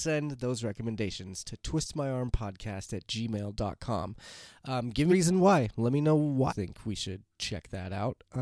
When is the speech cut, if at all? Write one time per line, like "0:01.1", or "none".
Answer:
0:05.1
0:06.5
0:07.3